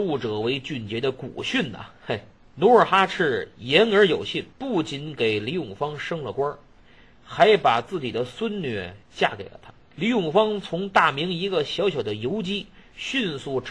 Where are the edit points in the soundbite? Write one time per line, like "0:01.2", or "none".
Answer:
0:02.4
0:04.5
0:09.0
0:09.8